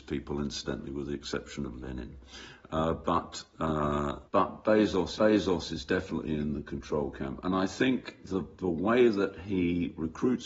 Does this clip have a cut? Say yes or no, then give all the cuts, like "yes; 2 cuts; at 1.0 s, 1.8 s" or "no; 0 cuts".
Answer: yes; 2 cuts; at 4.3 s, 5.2 s